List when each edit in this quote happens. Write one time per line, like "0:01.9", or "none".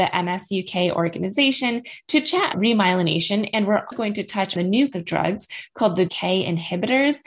0:02.5
0:03.9
0:04.6
0:04.9
0:06.1